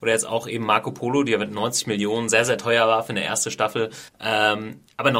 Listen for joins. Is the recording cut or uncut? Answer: cut